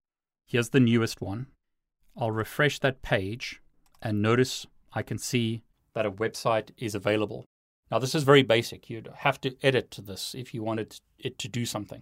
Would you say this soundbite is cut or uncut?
uncut